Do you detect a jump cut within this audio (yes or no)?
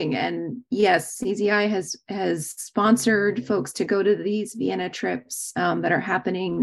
no